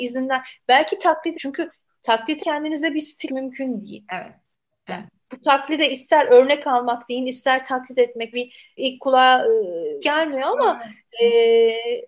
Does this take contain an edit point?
yes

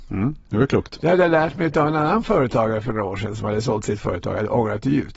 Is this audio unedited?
yes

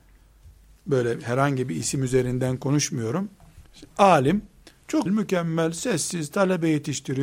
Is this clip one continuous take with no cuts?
no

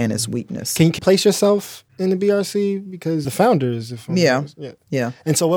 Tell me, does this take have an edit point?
yes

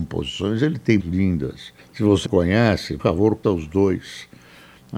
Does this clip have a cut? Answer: yes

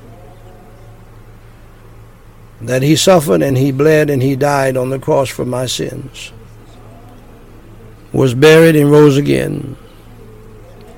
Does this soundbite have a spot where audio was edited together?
no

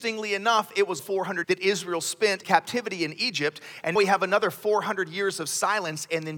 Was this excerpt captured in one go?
no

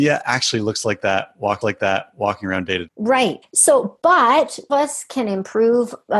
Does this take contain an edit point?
yes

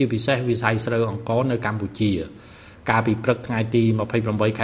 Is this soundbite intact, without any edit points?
yes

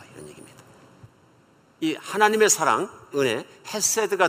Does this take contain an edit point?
yes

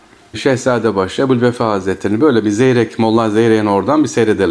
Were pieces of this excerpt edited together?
no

